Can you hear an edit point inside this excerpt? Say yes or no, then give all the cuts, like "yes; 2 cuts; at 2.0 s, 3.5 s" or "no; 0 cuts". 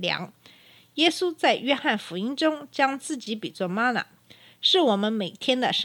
no; 0 cuts